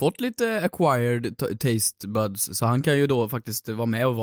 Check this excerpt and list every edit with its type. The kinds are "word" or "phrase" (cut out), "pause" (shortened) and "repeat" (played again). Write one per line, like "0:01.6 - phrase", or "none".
none